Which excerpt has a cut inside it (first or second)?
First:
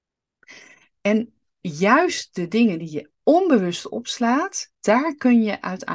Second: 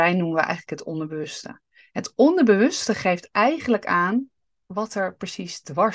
first